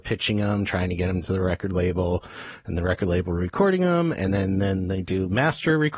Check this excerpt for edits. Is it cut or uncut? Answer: uncut